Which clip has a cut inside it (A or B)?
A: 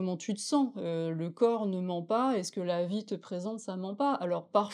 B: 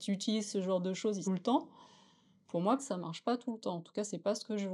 B